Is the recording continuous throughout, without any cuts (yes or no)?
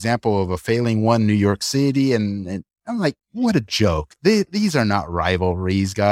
no